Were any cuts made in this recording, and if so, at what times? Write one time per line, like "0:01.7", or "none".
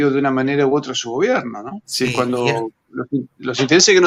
0:01.8